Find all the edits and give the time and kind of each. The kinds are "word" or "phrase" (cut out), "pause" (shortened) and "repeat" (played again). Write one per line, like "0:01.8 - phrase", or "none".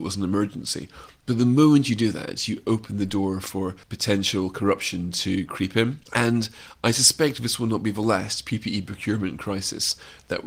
0:03.8 - pause